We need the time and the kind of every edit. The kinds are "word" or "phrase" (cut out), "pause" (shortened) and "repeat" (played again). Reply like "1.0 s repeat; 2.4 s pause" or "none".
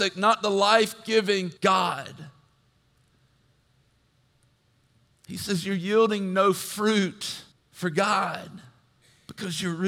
1.6 s pause; 7.5 s pause

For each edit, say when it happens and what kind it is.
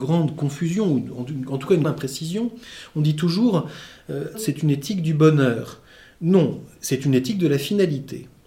1.8 s word; 4.3 s word

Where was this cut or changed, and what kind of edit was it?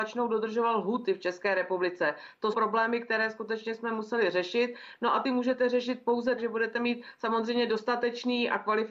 2.5 s word; 5.2 s word; 6.4 s word

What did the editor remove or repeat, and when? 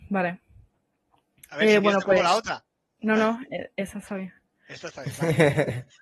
none

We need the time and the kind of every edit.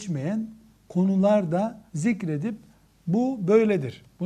1.9 s pause

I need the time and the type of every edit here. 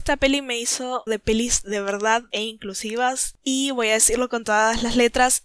1.1 s phrase; 2.3 s word

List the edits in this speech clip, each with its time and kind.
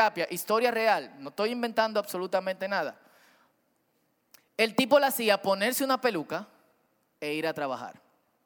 none

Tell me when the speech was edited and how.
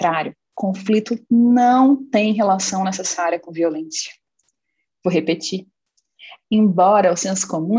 none

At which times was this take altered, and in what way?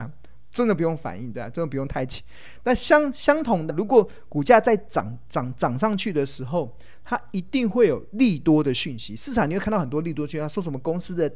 3.7 s word

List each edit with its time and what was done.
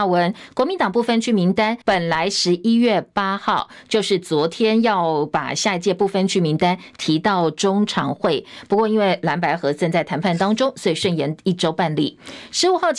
1.8 s pause

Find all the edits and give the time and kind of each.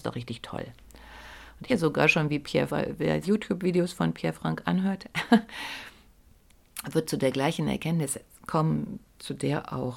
1.7 s word; 2.7 s word; 3.2 s phrase

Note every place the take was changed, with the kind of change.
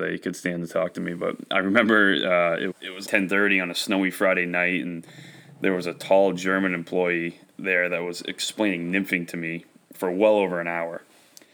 2.7 s word; 3.1 s word; 9.9 s word

